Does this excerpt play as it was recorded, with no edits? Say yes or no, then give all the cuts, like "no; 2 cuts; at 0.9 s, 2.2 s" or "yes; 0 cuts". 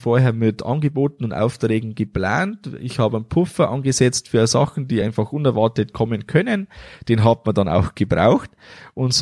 yes; 0 cuts